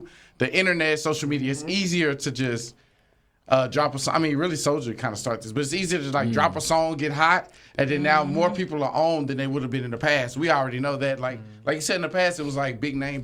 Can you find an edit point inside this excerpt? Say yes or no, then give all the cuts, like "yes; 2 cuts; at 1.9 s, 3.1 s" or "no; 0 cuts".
no; 0 cuts